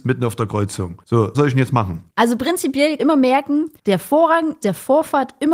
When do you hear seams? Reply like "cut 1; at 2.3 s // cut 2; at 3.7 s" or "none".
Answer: cut 1; at 1.3 s // cut 2; at 3.0 s // cut 3; at 4.6 s